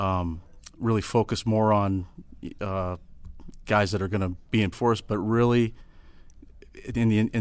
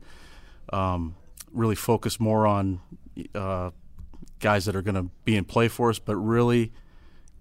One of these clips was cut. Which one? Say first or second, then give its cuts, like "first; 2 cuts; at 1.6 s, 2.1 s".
first; 1 cut; at 4.7 s